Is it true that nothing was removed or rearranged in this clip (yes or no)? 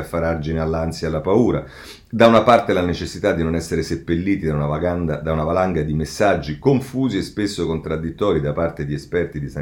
yes